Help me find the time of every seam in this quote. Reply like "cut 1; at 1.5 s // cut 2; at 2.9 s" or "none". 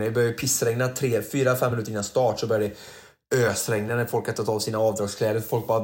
none